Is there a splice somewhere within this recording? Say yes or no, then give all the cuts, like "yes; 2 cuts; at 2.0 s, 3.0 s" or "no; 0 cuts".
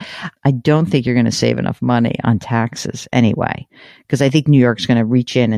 no; 0 cuts